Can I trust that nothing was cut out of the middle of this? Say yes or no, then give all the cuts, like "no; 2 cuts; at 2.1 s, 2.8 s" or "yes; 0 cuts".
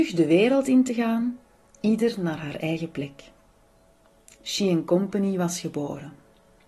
yes; 0 cuts